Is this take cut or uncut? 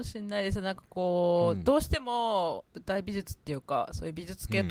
cut